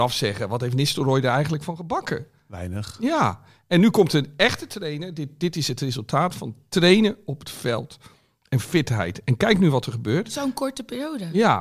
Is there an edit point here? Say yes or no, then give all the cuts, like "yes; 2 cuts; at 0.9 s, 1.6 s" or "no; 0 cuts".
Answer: no; 0 cuts